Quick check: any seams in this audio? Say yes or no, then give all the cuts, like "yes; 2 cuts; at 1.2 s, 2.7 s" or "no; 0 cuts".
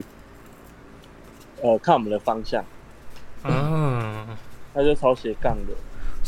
no; 0 cuts